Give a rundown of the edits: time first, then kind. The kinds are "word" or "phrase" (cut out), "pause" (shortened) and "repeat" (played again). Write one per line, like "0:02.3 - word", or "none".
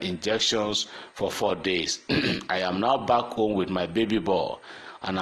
none